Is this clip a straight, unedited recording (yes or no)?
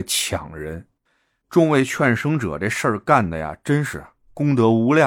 yes